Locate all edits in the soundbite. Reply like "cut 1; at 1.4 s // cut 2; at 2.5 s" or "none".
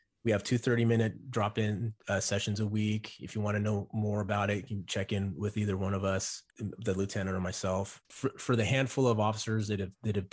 cut 1; at 2.0 s // cut 2; at 6.5 s // cut 3; at 8.0 s